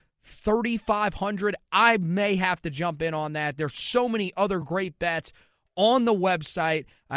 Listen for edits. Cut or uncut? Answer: uncut